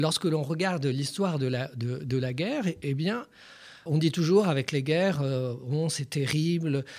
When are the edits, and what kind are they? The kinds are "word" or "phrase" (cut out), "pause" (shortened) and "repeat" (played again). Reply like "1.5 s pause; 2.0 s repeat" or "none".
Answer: 3.9 s word